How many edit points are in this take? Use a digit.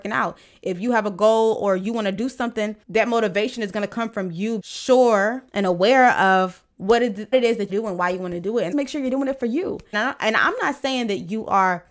8